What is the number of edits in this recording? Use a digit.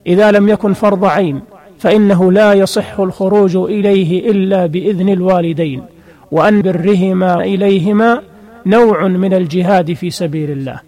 2